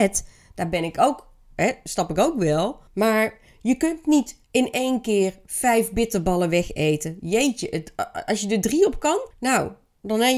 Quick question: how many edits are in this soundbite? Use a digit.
3